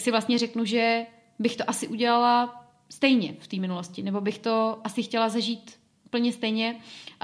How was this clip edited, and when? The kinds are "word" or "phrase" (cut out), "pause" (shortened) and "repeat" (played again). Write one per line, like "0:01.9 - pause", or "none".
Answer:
none